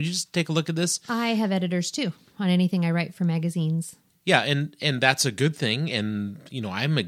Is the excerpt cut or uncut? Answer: uncut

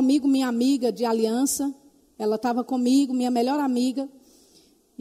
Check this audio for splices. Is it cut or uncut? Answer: uncut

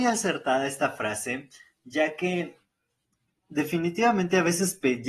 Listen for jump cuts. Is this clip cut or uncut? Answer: uncut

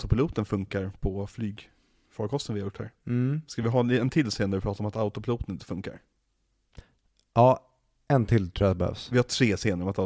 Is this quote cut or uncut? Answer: uncut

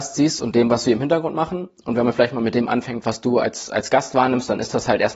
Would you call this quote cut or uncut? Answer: uncut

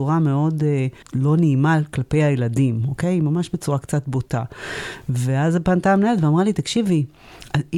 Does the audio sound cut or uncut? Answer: cut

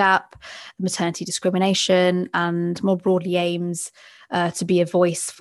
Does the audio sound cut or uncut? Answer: uncut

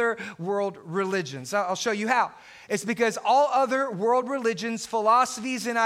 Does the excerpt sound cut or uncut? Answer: uncut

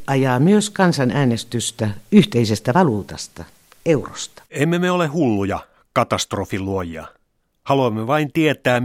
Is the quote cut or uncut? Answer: cut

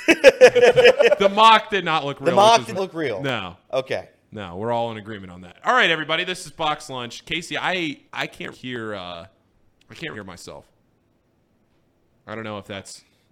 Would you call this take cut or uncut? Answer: cut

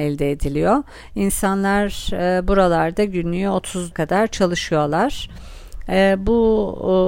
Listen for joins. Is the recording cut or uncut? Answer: cut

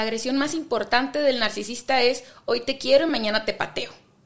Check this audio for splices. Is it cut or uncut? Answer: uncut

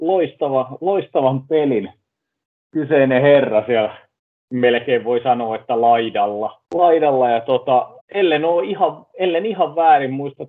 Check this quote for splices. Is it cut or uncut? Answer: cut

